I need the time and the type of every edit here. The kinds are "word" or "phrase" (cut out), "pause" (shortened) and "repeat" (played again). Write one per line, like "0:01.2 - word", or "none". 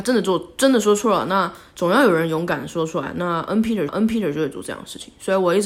0:03.9 - repeat